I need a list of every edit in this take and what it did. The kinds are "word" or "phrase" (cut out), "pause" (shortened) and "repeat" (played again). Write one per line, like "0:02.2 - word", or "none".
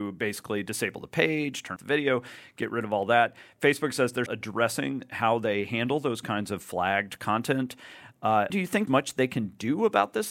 0:01.8 - word
0:04.3 - word
0:08.5 - word
0:08.9 - word